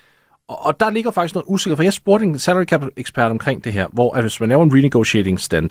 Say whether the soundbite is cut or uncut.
uncut